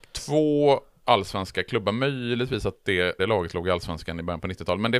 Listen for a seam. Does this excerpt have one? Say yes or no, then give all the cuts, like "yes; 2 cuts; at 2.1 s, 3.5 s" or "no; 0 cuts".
yes; 1 cut; at 3.2 s